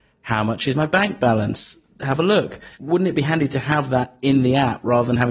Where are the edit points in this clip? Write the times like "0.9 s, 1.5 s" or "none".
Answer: 2.7 s